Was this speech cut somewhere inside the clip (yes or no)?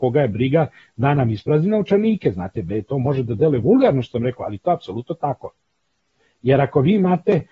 no